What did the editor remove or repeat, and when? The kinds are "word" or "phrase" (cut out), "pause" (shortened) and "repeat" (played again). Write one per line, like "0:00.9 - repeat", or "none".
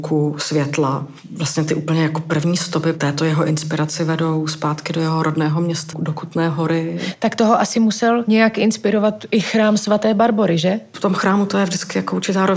0:05.9 - word